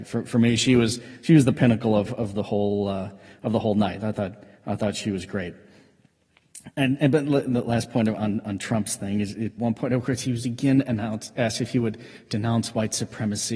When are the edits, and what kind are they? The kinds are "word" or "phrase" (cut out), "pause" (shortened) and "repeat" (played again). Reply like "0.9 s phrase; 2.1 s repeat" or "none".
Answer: 9.6 s word